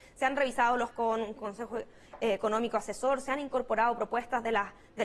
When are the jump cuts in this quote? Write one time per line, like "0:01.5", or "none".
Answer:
0:00.9